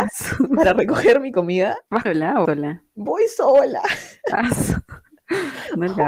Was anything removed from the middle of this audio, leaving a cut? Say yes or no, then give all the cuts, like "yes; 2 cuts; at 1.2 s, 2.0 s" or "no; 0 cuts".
yes; 2 cuts; at 2.0 s, 2.4 s